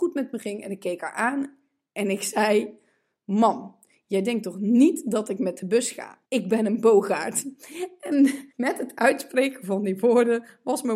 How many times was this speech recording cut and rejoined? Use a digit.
2